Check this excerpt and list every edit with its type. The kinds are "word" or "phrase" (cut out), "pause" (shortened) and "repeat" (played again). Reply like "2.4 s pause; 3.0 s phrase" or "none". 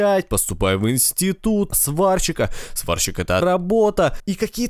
1.7 s word; 3.4 s word